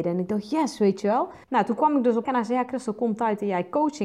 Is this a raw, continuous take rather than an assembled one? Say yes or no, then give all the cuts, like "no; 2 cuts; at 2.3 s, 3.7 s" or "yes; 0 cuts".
no; 2 cuts; at 1.4 s, 2.2 s